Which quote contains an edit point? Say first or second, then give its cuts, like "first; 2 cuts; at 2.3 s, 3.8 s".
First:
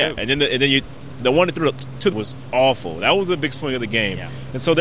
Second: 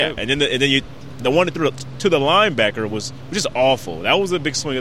first; 2 cuts; at 2.1 s, 2.5 s